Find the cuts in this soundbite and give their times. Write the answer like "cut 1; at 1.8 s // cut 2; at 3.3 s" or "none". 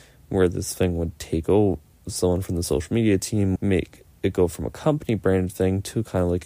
cut 1; at 3.6 s